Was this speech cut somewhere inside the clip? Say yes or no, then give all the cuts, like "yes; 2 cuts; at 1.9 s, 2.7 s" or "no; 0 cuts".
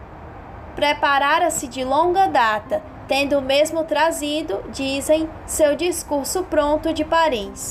no; 0 cuts